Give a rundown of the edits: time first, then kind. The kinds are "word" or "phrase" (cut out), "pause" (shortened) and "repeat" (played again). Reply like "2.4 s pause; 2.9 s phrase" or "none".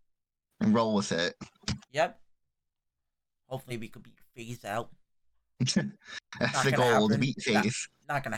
1.8 s pause; 3.7 s word; 5.0 s pause